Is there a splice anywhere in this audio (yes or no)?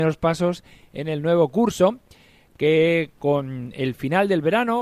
no